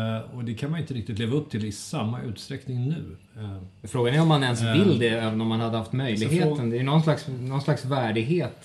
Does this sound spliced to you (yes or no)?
no